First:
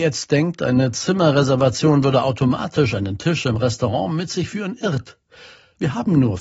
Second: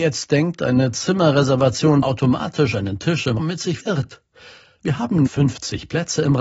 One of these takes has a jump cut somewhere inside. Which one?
second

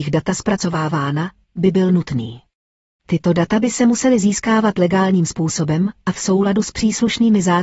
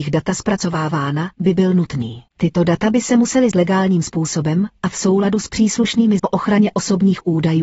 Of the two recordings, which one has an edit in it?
second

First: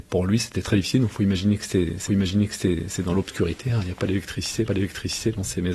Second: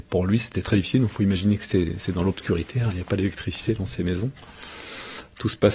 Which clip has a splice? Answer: first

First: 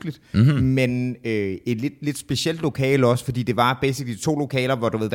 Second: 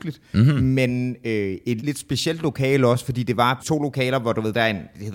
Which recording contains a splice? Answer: second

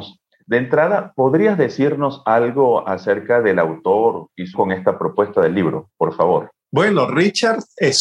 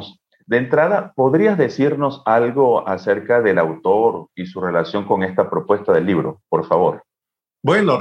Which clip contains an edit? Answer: first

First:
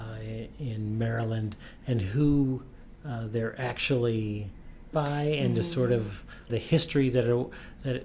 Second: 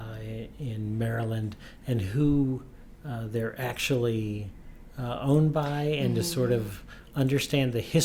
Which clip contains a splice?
first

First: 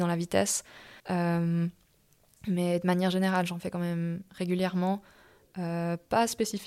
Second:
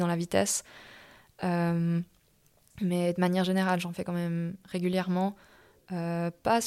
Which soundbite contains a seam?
first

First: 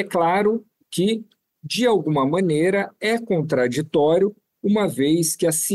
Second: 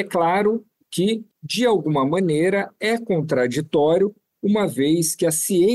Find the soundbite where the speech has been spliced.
second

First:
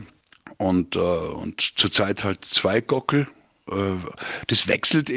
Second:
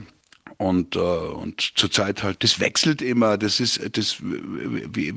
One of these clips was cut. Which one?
second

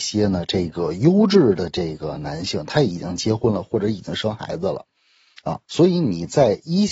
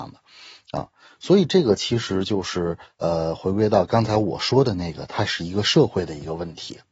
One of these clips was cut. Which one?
first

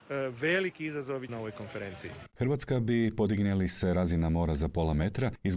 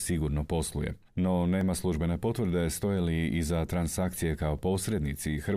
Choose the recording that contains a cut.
first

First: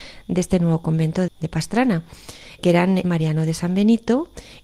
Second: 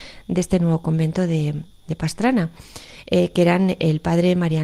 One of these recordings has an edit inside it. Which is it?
first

